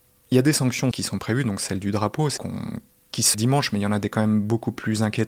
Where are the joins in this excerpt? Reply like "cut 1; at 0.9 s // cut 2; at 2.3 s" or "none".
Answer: cut 1; at 0.9 s // cut 2; at 2.4 s // cut 3; at 3.3 s